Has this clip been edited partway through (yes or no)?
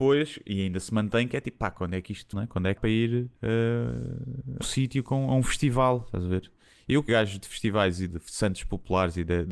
yes